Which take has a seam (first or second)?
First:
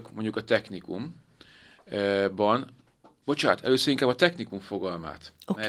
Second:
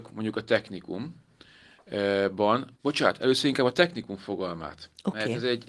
second